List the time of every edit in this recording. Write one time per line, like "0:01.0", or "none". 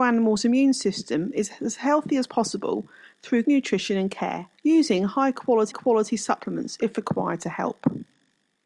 0:03.4
0:04.6
0:05.7